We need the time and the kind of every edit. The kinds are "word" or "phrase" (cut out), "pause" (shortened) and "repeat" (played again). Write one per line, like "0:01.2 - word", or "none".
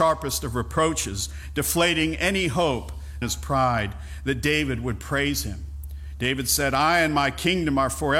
0:03.2 - phrase